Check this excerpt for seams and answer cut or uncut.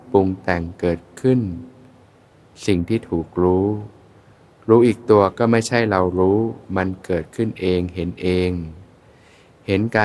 uncut